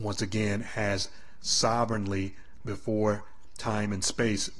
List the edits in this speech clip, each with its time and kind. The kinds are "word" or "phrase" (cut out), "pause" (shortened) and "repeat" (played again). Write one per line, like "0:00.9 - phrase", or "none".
0:02.6 - word